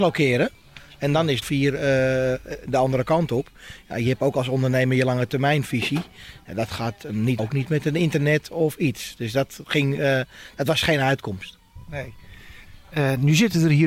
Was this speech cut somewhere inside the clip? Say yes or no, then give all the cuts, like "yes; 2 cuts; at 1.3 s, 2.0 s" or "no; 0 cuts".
yes; 2 cuts; at 1.4 s, 7.4 s